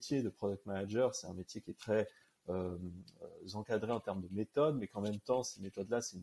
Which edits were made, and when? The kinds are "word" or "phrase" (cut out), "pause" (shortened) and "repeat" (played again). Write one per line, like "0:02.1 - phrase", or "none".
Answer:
none